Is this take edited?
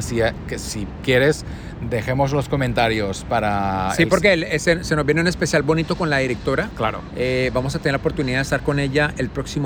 no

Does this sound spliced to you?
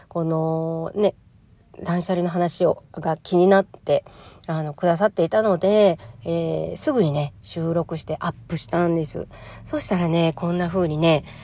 yes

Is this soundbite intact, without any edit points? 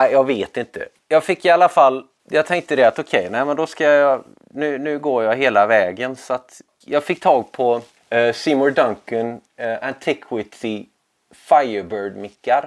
yes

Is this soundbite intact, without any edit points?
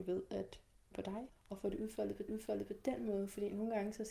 no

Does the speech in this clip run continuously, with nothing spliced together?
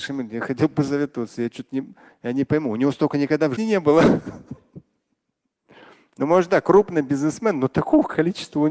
no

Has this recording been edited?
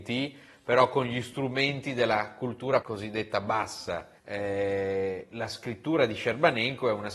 yes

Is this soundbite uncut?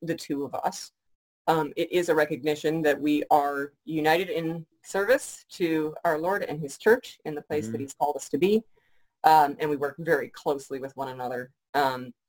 yes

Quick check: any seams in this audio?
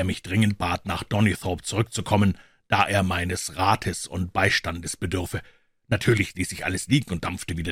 no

